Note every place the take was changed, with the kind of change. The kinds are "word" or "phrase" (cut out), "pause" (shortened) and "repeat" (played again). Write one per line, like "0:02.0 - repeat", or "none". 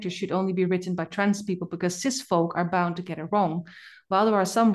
none

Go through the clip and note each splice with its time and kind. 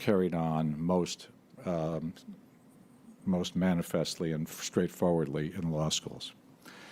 none

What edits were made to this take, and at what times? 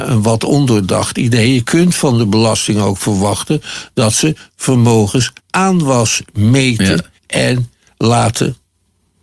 0:05.4 - pause
0:07.2 - pause

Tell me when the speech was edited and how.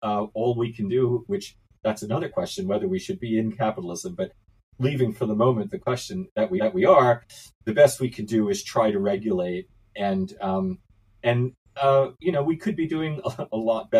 0:06.6 - repeat

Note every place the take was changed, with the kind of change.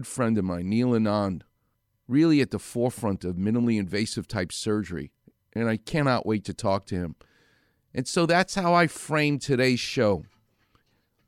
none

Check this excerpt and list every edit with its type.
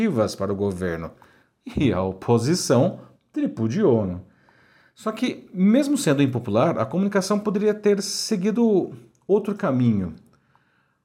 none

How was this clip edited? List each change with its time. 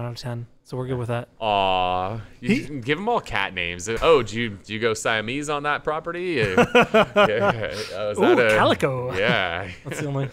0:04.0 - word

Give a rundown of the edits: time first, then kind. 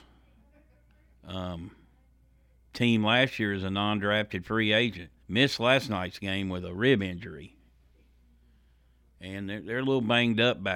0:05.2 - pause

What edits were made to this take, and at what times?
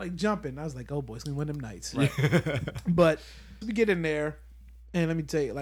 0:03.6 - phrase

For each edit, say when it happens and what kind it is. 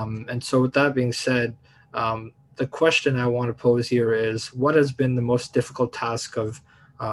none

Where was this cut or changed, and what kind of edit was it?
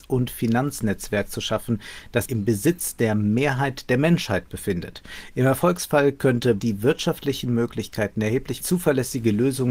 0:02.3 - word
0:06.6 - word
0:08.6 - phrase

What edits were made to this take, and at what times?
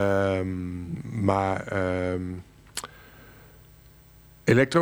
none

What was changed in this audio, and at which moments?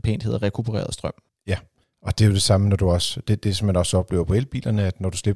none

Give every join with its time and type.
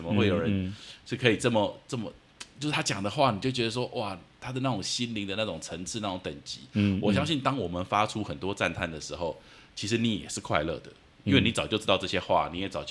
none

